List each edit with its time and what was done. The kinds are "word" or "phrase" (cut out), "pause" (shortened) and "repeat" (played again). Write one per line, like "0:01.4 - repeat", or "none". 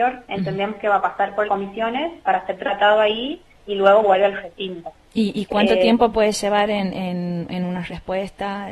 0:01.4 - word
0:03.6 - pause
0:05.0 - pause